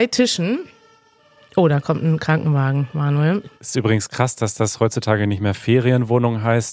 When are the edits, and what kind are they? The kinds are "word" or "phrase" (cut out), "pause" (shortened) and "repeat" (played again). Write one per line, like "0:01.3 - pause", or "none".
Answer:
0:03.5 - pause